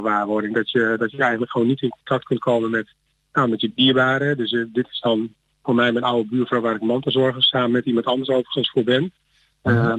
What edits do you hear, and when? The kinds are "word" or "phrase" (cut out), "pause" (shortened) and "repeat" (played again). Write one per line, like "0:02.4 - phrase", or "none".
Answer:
none